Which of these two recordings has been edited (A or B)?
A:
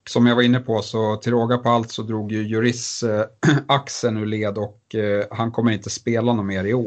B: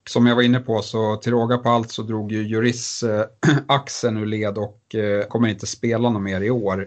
B